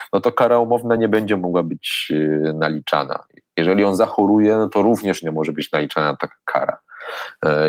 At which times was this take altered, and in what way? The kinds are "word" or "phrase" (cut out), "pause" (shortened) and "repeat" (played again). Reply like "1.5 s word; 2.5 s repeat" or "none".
none